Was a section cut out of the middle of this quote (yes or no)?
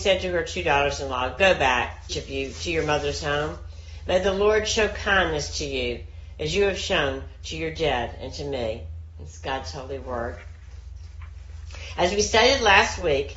yes